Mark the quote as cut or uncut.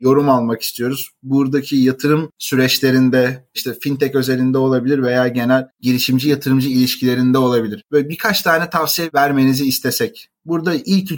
uncut